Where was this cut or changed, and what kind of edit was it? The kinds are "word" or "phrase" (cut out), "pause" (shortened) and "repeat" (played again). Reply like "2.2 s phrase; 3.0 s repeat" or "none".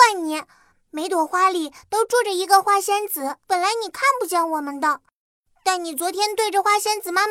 3.4 s pause